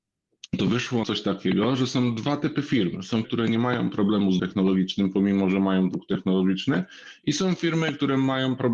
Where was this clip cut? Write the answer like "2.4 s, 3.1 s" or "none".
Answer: 1.0 s, 3.2 s, 4.4 s